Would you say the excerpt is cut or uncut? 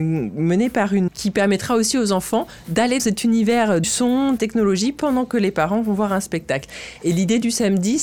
cut